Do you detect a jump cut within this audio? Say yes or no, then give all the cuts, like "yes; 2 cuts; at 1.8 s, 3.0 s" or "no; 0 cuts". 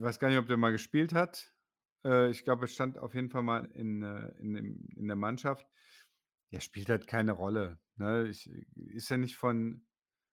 yes; 1 cut; at 3.6 s